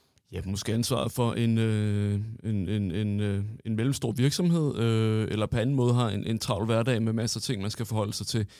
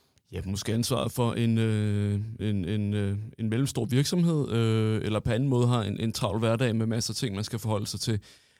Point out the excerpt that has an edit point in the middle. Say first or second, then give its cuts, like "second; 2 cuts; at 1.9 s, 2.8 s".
second; 1 cut; at 2.4 s